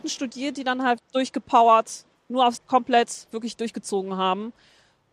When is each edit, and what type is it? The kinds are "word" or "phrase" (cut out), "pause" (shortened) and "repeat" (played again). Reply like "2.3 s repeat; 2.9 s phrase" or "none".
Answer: 1.0 s word; 2.2 s pause; 2.6 s phrase